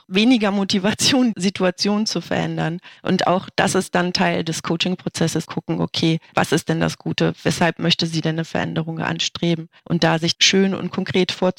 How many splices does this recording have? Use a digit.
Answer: 6